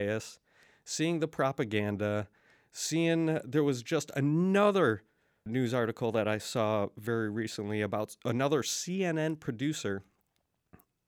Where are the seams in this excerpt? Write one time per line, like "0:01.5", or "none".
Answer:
none